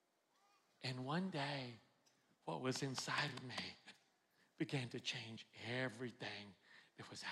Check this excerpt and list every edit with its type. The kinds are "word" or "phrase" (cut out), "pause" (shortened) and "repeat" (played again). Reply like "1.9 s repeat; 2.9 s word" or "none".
none